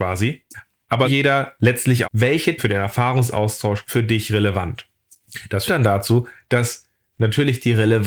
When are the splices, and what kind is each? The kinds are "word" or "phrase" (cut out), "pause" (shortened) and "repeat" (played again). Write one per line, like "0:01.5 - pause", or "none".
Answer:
0:01.0 - word
0:02.0 - word
0:02.6 - word
0:03.9 - word
0:05.7 - word